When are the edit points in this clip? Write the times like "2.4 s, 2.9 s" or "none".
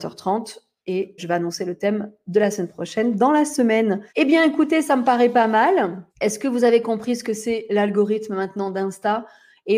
1.2 s, 4.1 s, 6.1 s